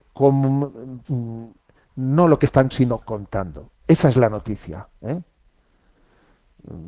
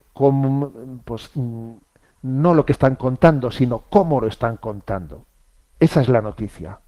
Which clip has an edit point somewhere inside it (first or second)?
first